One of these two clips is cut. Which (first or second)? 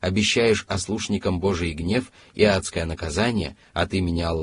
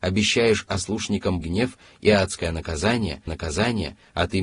second